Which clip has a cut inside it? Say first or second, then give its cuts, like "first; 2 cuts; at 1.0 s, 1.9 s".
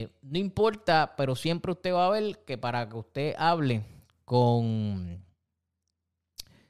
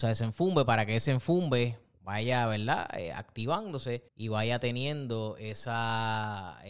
second; 1 cut; at 4.1 s